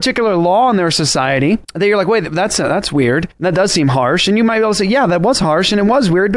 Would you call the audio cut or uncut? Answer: cut